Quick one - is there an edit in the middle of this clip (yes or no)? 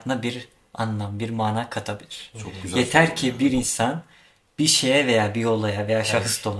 no